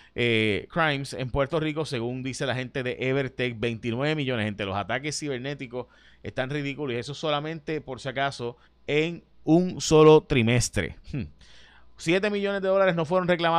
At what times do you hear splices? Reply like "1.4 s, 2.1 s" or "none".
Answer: 8.6 s, 11.0 s